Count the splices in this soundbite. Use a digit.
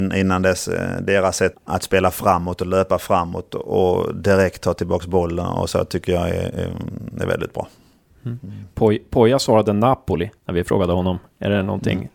2